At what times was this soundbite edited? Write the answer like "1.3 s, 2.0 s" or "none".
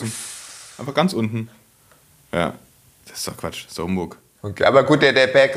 none